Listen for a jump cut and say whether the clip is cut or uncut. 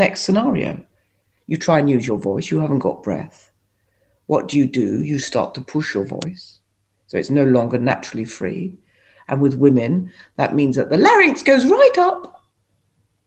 uncut